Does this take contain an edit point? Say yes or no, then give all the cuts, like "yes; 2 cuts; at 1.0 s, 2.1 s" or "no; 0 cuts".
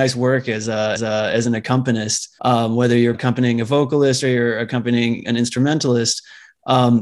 yes; 3 cuts; at 1.0 s, 2.4 s, 3.1 s